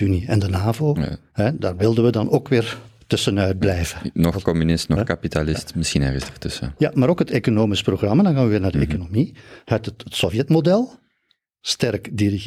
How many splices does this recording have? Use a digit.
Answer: 0